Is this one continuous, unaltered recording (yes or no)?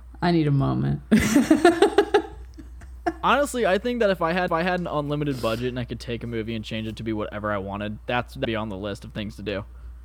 no